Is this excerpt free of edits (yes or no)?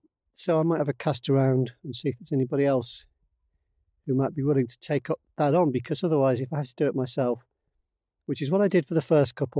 yes